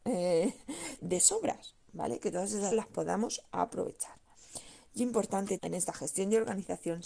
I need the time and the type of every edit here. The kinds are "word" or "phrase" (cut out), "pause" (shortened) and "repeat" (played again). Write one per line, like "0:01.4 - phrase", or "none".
0:01.0 - word
0:02.7 - word
0:05.6 - word